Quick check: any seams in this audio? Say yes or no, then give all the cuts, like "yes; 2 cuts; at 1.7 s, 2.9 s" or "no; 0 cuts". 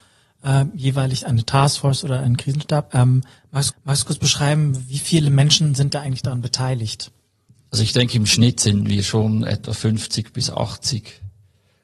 yes; 2 cuts; at 3.7 s, 7.5 s